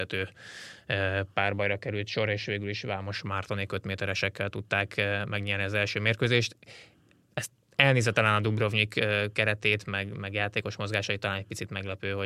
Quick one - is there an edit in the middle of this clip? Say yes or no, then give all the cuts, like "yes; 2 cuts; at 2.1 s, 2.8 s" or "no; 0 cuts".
no; 0 cuts